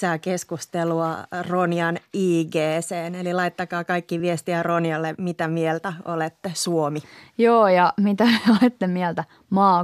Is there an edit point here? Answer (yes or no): no